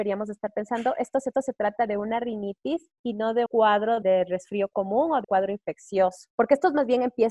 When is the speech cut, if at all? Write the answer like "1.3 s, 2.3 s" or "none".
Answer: 1.3 s, 3.5 s, 4.0 s, 5.2 s, 6.3 s